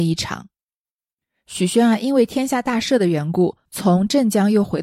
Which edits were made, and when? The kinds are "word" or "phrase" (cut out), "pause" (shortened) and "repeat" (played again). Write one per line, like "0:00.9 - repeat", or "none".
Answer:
0:03.7 - pause